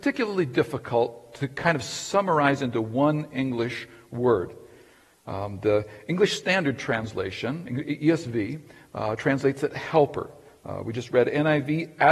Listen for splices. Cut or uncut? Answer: uncut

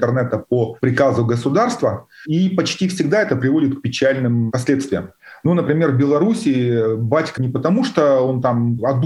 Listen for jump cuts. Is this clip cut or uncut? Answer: cut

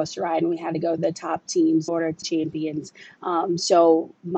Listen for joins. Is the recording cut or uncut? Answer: cut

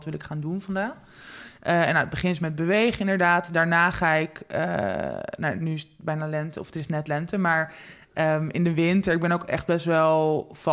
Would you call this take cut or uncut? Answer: uncut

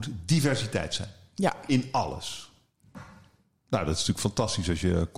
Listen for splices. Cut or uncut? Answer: uncut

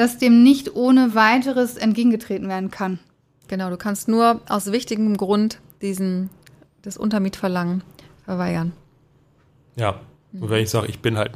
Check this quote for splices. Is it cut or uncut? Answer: uncut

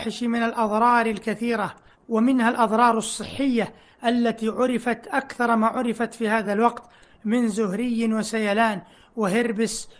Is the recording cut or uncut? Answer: uncut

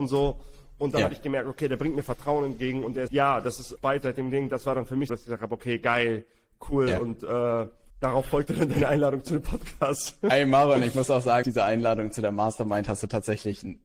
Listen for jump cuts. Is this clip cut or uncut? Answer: cut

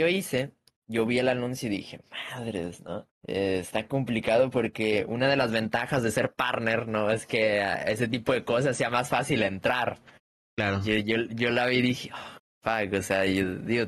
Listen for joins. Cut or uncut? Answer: cut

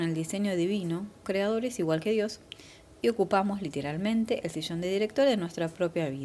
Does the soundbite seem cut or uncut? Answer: cut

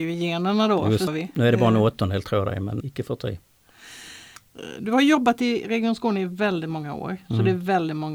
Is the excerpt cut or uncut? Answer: cut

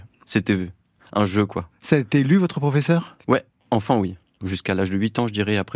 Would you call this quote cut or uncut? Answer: cut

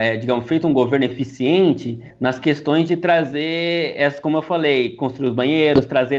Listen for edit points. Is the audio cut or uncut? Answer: uncut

